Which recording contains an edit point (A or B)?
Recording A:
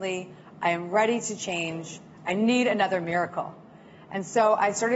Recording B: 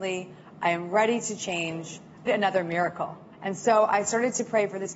B